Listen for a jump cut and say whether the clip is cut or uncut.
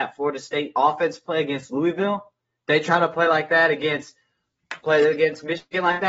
uncut